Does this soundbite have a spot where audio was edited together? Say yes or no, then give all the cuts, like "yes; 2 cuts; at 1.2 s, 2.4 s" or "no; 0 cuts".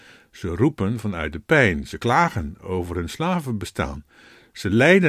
no; 0 cuts